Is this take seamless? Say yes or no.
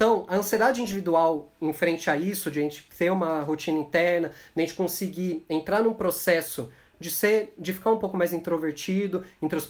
yes